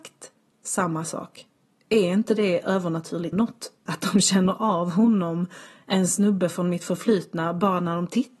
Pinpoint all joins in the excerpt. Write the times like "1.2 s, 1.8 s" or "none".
1.6 s, 3.3 s